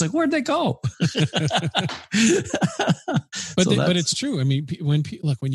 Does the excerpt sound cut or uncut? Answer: uncut